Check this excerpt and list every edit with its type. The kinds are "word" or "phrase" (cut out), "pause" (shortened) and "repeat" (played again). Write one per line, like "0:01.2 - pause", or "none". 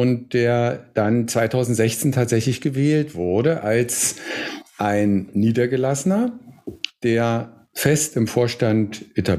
none